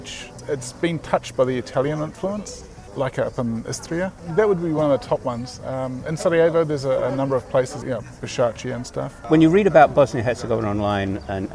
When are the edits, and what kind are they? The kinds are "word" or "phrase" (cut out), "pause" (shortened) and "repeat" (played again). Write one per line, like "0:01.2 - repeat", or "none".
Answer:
0:07.8 - word